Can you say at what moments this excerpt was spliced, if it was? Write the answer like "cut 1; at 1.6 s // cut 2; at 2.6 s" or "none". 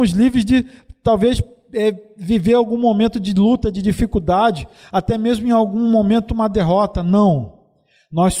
none